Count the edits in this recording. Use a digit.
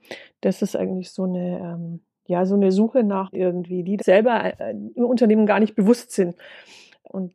2